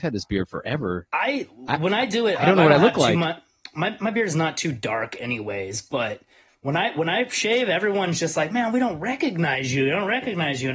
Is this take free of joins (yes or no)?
yes